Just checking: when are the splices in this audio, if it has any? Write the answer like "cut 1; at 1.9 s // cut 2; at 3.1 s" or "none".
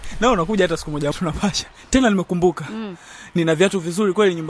cut 1; at 1.1 s